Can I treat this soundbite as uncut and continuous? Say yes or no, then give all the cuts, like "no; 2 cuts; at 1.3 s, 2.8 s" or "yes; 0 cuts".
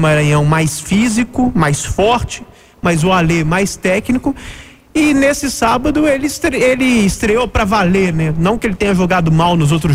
yes; 0 cuts